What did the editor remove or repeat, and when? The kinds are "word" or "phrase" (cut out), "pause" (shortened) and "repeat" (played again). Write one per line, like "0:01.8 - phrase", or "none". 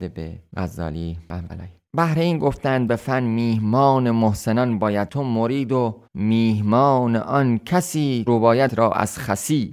0:01.5 - word
0:02.9 - word
0:05.1 - word
0:06.1 - pause
0:08.3 - word
0:08.7 - word

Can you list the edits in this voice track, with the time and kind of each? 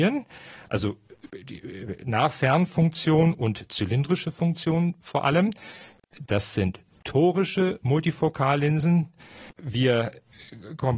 0:09.5 - pause

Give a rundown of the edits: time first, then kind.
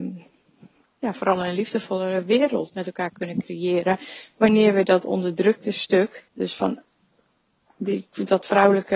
0:06.3 - pause

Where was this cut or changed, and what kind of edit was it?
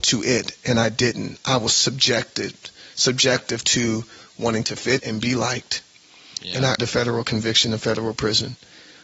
0:01.7 - word
0:05.0 - word
0:06.8 - word

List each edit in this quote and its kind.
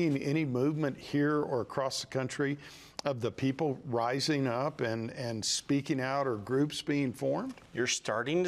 none

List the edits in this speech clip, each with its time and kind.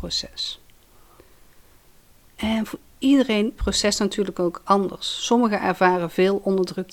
0:03.6 - phrase

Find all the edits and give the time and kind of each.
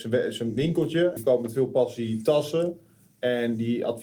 0:01.2 - word

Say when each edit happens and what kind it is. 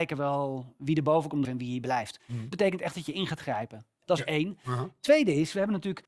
0:01.4 - word
0:02.5 - word

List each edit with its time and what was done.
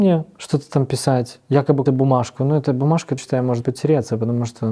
0:01.9 - word
0:03.2 - word
0:03.6 - word

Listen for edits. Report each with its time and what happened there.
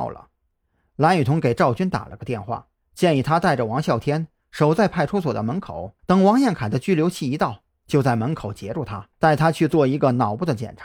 0:02.8 - pause
0:06.0 - pause
0:09.1 - pause

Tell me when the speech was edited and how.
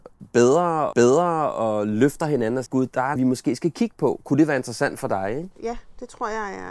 0:00.9 - repeat
0:02.7 - word
0:03.2 - phrase

